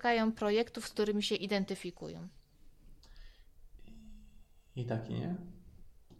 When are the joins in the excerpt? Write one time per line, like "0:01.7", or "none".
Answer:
none